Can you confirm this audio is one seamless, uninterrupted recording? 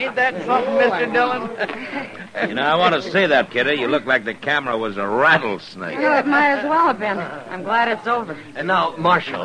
no; 1 cut; at 3.5 s

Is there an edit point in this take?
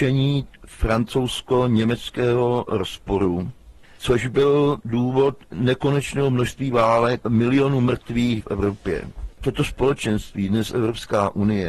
yes; 4 cuts; at 3.8 s, 7.2 s, 8.4 s, 9.3 s

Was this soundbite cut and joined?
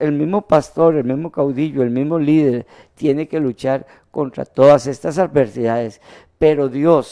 no; 0 cuts

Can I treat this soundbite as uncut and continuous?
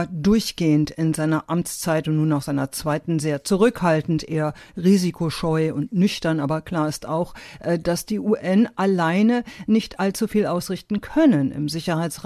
yes; 0 cuts

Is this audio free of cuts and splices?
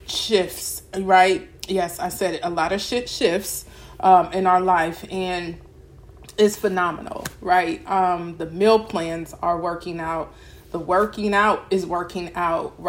yes; 0 cuts

